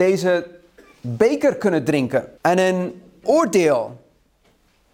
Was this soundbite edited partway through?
yes; 2 cuts; at 2.4 s, 3.2 s

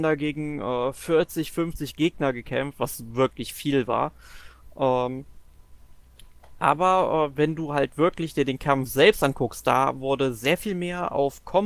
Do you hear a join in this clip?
no; 0 cuts

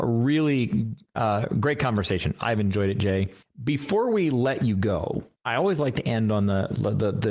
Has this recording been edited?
yes; 2 cuts; at 3.4 s, 5.4 s

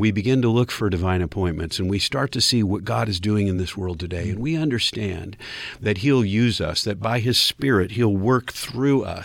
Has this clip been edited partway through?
no; 0 cuts

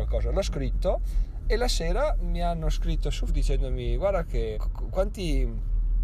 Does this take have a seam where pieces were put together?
yes; 2 cuts; at 3.3 s, 4.5 s

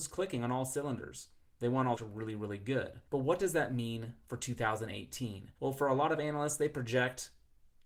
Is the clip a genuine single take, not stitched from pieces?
no; 3 cuts; at 2.0 s, 3.1 s, 5.6 s

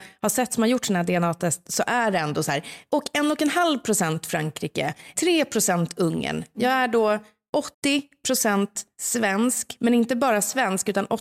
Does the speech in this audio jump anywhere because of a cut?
yes; 1 cut; at 7.7 s

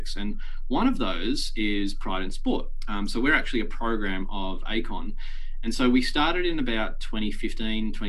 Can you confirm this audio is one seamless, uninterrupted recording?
yes; 0 cuts

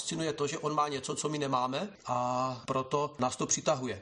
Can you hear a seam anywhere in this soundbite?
no; 0 cuts

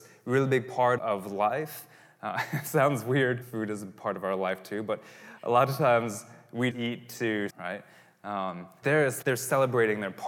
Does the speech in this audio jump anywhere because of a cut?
yes; 6 cuts; at 1.0 s, 3.4 s, 6.7 s, 7.5 s, 8.8 s, 9.2 s

